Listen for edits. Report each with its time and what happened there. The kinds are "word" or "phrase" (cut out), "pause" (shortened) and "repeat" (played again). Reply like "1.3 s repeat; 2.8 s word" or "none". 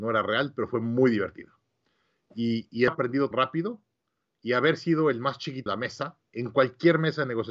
2.9 s word; 3.3 s word; 5.7 s word